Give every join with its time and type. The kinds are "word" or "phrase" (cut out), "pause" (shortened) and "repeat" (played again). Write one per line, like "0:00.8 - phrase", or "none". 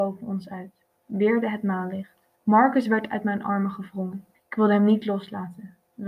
0:02.3 - pause
0:04.3 - pause